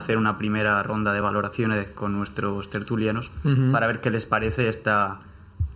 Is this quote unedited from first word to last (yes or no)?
yes